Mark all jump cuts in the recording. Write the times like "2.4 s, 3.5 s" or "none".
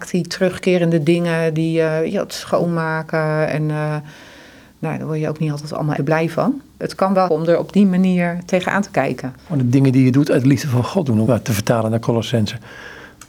6.0 s, 6.7 s, 7.3 s, 9.4 s, 11.3 s